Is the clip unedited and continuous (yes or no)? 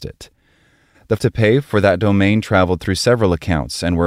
no